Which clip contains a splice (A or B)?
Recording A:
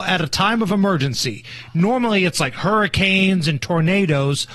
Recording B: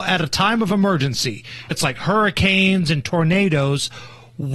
B